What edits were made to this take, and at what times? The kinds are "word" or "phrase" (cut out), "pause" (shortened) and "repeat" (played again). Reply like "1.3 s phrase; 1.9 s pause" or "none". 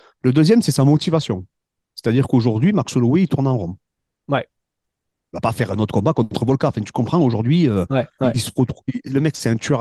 none